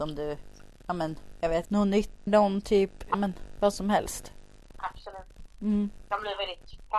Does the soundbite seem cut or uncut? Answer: cut